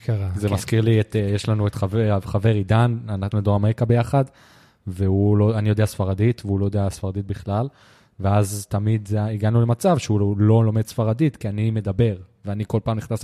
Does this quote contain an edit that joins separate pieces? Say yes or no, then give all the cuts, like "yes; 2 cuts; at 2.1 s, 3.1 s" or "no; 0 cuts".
yes; 1 cut; at 3.3 s